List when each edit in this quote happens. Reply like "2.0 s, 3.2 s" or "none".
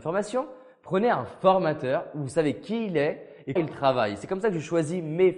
3.6 s